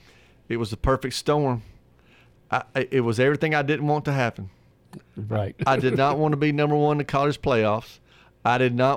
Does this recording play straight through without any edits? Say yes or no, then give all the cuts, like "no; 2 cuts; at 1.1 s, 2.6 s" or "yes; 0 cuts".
yes; 0 cuts